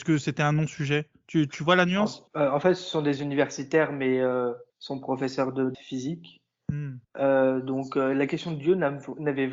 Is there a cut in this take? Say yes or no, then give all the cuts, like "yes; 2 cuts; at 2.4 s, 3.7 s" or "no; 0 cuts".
yes; 4 cuts; at 2.3 s, 4.7 s, 5.7 s, 7.0 s